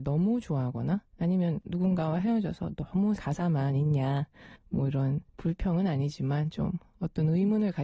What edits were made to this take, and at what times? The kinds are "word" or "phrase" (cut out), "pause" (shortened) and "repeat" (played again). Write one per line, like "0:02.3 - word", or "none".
0:01.1 - pause
0:03.2 - word
0:04.6 - pause
0:05.3 - pause